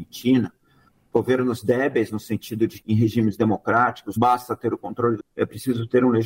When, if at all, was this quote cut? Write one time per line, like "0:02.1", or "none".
0:02.8
0:04.2
0:05.2